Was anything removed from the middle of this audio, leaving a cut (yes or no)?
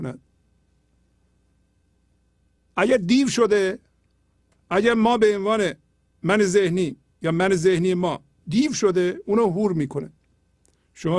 no